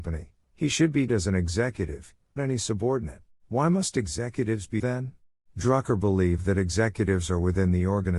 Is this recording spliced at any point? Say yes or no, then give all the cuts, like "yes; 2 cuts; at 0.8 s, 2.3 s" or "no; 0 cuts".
yes; 5 cuts; at 1.1 s, 2.4 s, 3.4 s, 4.8 s, 5.3 s